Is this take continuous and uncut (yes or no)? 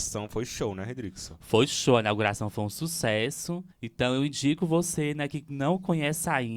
no